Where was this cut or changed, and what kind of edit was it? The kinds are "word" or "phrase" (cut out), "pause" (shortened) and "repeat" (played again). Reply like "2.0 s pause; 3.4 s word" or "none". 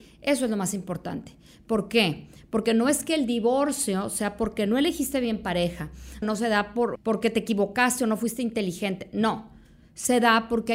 6.2 s phrase; 7.0 s word